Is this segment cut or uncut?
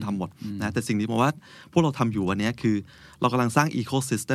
uncut